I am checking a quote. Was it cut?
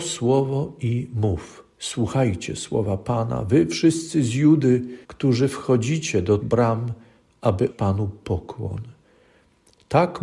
yes; 4 cuts; at 1.7 s, 5.0 s, 6.4 s, 7.7 s

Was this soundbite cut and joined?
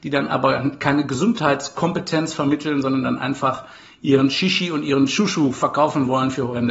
no; 0 cuts

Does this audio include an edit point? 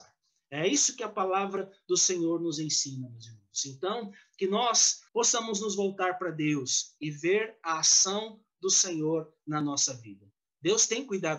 yes; 1 cut; at 5.1 s

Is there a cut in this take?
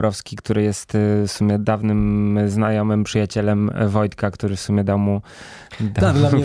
no; 0 cuts

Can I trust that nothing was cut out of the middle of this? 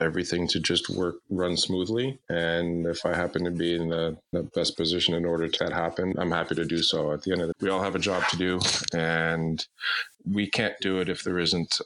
no; 6 cuts; at 2.2 s, 4.3 s, 5.6 s, 6.1 s, 7.5 s, 10.1 s

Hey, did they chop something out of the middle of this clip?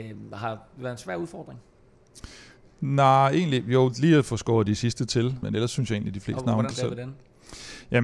yes; 2 cuts; at 5.4 s, 6.7 s

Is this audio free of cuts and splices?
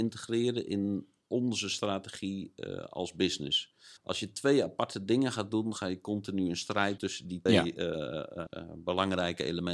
no; 4 cuts; at 4.0 s, 7.0 s, 7.5 s, 8.5 s

